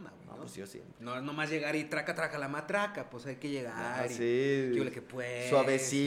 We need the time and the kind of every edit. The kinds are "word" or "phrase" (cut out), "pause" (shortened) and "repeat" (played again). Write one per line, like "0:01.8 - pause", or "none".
none